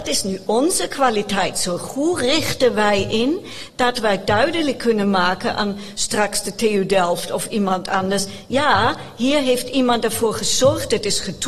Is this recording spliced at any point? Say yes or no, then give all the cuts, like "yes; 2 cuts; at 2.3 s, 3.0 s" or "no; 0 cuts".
no; 0 cuts